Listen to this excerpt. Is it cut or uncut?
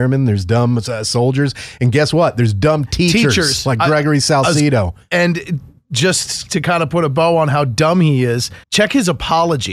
cut